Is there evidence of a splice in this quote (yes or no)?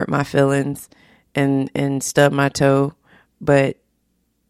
no